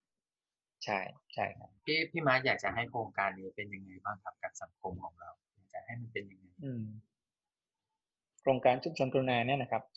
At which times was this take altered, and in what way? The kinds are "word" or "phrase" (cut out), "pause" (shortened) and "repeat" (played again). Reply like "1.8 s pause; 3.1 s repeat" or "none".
1.2 s pause; 1.8 s pause; 5.4 s pause